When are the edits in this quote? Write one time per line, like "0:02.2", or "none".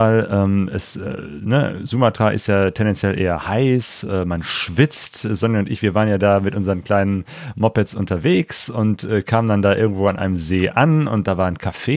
none